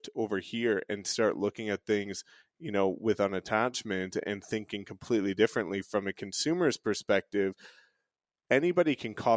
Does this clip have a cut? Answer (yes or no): no